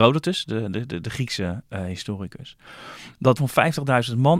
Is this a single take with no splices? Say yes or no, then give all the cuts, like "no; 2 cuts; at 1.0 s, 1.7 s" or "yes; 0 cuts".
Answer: no; 1 cut; at 3.4 s